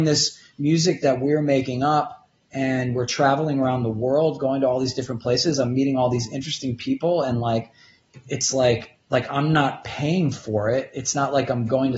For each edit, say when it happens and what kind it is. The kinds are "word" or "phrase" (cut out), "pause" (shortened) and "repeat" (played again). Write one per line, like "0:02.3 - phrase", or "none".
0:09.0 - pause